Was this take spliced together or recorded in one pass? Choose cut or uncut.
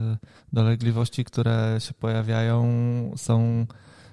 uncut